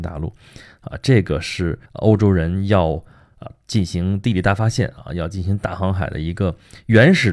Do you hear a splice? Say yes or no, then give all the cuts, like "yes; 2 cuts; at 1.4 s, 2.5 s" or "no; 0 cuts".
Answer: yes; 1 cut; at 1.9 s